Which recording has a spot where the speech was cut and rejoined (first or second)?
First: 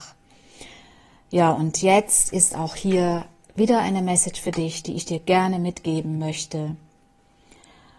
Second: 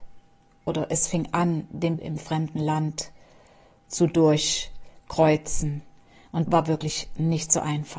second